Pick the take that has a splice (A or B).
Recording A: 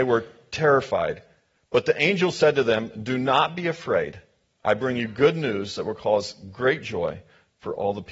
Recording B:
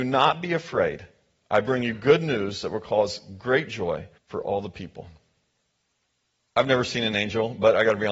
B